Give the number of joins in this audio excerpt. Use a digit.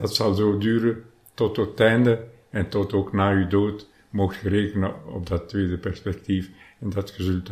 0